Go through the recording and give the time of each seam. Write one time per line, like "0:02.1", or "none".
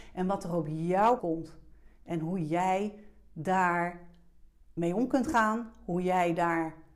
0:01.2